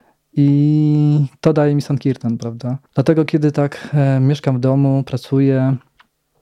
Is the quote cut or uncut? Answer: cut